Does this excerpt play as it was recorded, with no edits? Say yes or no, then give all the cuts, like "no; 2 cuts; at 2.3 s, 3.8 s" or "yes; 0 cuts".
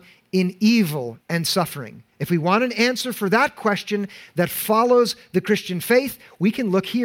no; 2 cuts; at 1.2 s, 2.1 s